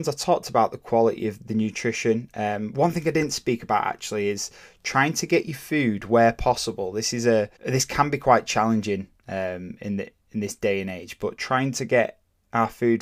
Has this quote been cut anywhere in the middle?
yes; 1 cut; at 7.6 s

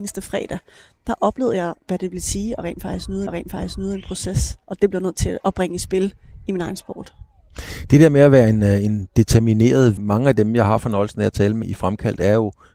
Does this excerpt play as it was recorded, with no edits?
no; 5 cuts; at 3.3 s, 4.6 s, 5.4 s, 10.0 s, 11.6 s

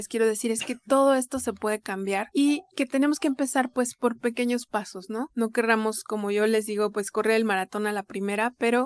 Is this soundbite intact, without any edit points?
yes; 0 cuts

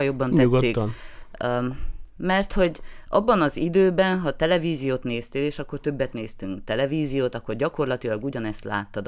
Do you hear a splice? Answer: no; 0 cuts

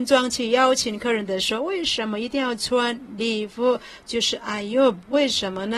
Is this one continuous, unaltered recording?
yes; 0 cuts

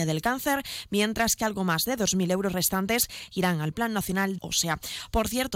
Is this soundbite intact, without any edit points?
no; 1 cut; at 4.4 s

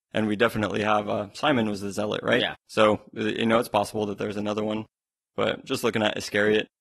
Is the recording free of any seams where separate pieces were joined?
yes; 0 cuts

